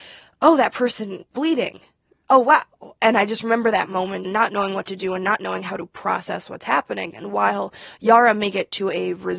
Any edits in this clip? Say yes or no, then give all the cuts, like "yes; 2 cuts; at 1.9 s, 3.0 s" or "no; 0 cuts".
yes; 2 cuts; at 1.3 s, 4.2 s